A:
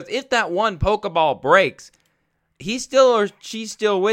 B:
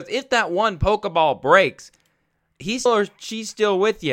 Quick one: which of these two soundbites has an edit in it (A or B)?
B